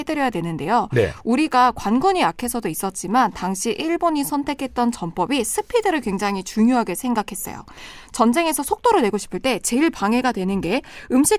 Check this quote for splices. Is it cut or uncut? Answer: uncut